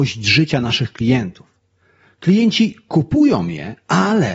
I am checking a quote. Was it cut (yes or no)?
no